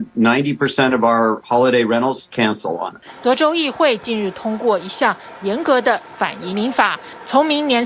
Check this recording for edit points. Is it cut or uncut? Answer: uncut